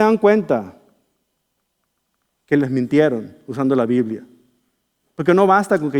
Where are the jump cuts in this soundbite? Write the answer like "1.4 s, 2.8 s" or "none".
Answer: none

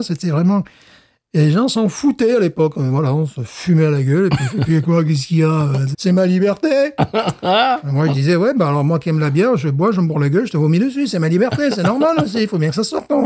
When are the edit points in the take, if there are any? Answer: 5.9 s

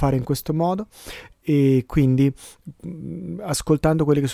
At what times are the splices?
none

